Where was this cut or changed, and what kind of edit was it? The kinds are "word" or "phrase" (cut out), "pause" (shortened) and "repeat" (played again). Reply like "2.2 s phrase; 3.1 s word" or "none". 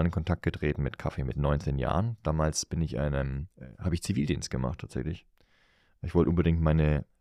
none